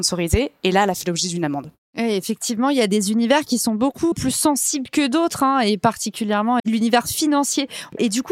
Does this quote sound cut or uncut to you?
cut